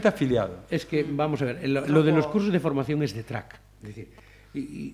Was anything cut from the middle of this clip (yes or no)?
yes